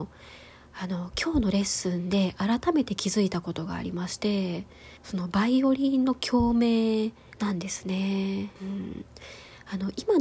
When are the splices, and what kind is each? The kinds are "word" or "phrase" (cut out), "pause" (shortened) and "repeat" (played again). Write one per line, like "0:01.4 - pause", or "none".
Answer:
0:05.0 - pause
0:07.3 - pause
0:08.6 - pause